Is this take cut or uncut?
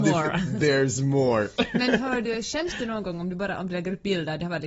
uncut